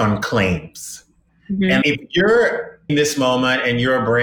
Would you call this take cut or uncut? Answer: cut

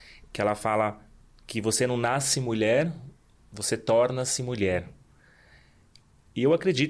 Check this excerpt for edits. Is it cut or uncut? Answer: uncut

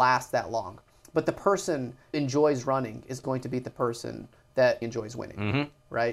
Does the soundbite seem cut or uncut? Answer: cut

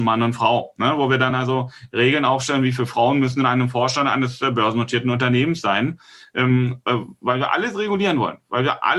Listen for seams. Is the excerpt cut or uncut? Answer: uncut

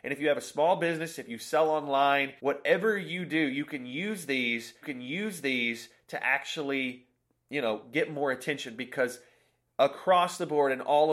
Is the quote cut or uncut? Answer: cut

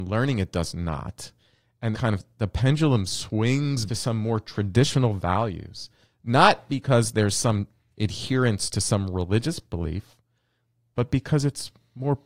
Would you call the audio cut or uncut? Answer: cut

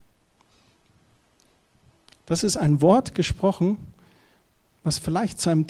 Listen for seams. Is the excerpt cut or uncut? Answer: uncut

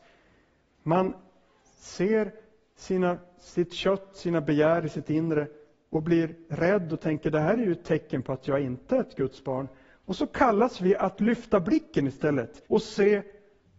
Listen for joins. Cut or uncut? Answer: cut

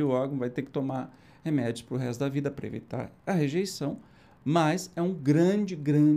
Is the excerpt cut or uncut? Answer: uncut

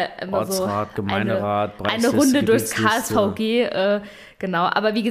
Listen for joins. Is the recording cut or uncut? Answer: uncut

